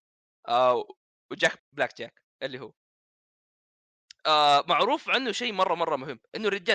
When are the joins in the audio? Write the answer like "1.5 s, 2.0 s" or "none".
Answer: 1.6 s